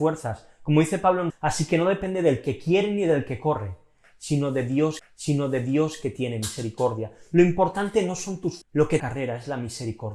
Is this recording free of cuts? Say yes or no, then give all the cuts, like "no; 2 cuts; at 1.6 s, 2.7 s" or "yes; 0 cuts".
no; 4 cuts; at 1.3 s, 5.0 s, 8.6 s, 9.0 s